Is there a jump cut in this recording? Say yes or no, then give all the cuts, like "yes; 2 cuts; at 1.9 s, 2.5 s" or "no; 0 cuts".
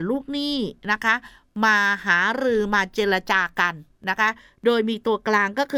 no; 0 cuts